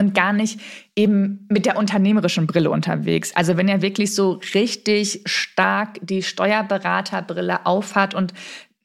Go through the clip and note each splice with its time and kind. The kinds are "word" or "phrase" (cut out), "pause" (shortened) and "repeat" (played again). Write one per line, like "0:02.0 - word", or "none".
none